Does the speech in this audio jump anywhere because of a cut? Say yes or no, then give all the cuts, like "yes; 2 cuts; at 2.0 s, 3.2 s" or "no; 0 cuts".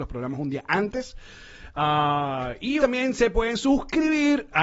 yes; 1 cut; at 2.8 s